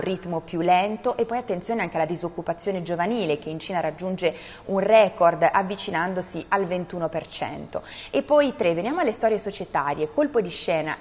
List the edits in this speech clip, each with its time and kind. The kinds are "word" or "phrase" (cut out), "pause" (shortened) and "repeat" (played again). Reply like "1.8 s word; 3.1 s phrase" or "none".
none